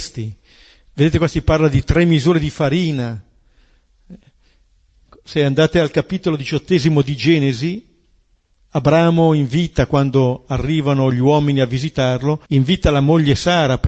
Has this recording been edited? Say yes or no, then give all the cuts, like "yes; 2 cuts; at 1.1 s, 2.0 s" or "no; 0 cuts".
yes; 1 cut; at 12.4 s